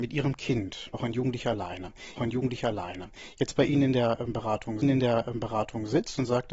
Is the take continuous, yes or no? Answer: no